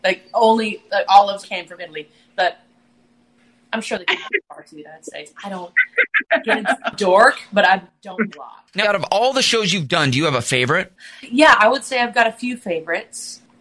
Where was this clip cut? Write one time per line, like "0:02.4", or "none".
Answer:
0:01.4
0:06.9
0:08.3
0:08.8